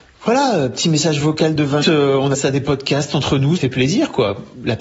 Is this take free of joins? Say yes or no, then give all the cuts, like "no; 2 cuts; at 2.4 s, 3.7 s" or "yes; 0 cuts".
no; 3 cuts; at 1.8 s, 2.3 s, 3.6 s